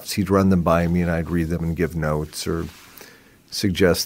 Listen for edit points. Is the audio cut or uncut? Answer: uncut